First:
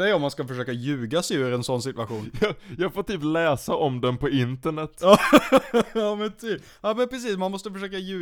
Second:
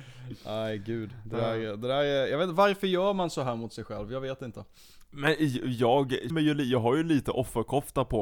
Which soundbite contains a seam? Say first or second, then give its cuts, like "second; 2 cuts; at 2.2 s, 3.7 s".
second; 1 cut; at 6.3 s